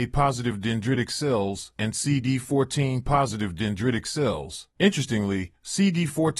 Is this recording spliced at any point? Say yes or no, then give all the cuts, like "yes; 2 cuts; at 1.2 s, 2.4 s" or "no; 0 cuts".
yes; 1 cut; at 4.7 s